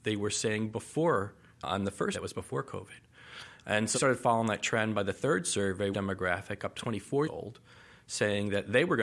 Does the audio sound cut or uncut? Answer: cut